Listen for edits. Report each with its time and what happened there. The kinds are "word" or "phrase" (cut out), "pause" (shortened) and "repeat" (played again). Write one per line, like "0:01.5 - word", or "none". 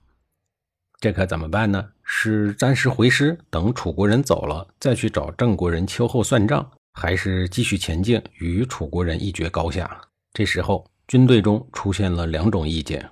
0:06.8 - pause
0:10.1 - pause